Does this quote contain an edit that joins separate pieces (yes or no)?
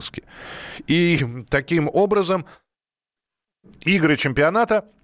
no